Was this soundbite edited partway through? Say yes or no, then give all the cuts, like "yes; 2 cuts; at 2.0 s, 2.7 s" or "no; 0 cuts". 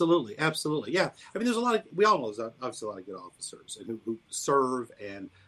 no; 0 cuts